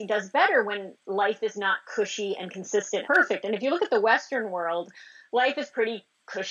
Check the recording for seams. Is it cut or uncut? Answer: cut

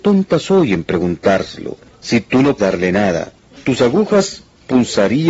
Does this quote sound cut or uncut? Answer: cut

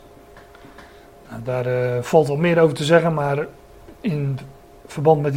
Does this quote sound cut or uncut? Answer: uncut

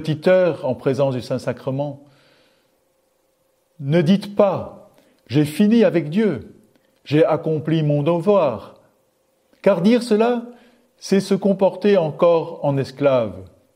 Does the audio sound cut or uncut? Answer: uncut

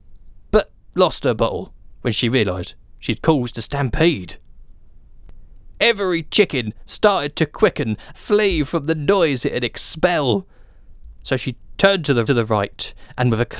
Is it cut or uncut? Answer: cut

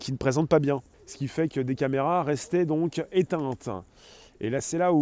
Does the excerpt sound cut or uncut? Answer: cut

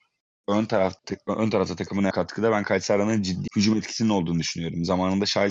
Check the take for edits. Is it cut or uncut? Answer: cut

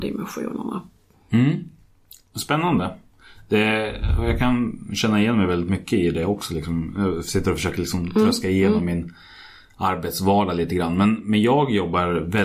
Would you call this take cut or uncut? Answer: uncut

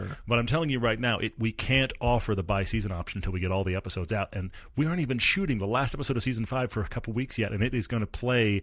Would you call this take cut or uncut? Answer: uncut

